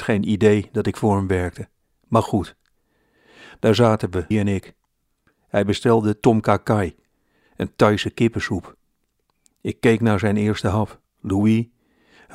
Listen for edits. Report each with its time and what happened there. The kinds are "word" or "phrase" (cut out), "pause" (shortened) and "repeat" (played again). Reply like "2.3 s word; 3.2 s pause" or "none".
4.3 s word